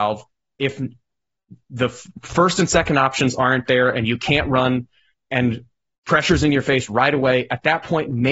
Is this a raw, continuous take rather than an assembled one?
yes; 0 cuts

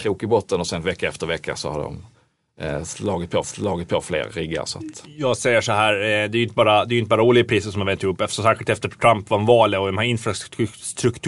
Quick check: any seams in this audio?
yes; 1 cut; at 3.4 s

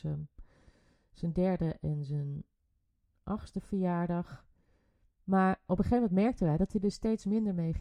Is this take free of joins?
yes; 0 cuts

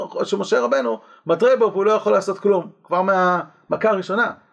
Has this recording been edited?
no; 0 cuts

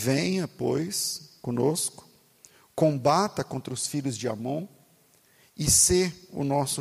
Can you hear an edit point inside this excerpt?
no; 0 cuts

